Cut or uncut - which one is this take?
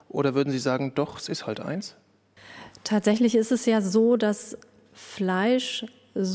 uncut